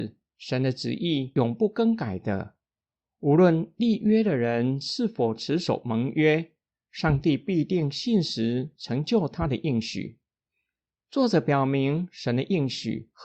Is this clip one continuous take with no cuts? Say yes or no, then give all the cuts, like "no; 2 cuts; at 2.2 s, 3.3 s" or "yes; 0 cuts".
yes; 0 cuts